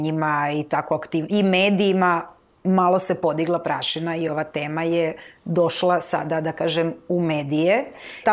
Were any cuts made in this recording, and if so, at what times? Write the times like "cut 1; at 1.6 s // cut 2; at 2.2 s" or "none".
none